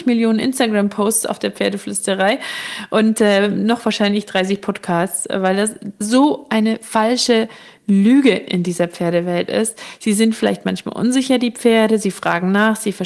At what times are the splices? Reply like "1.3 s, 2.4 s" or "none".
6.0 s